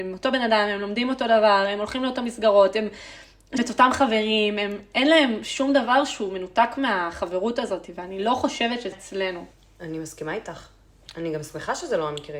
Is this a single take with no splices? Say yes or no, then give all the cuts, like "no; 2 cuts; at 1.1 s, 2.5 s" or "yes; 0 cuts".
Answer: no; 3 cuts; at 3.6 s, 8.9 s, 9.5 s